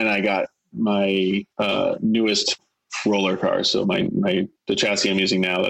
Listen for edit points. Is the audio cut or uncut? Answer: cut